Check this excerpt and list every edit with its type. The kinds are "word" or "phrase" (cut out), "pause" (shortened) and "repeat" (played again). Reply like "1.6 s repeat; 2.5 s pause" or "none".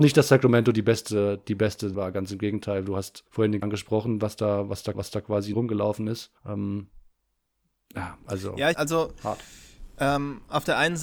1.9 s phrase; 3.3 s pause; 3.6 s word; 4.9 s repeat; 5.5 s word; 6.4 s pause; 8.7 s phrase